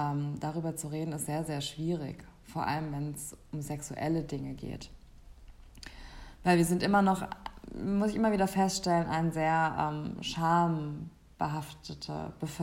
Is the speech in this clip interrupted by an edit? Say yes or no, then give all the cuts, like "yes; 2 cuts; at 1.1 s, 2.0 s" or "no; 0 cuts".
no; 0 cuts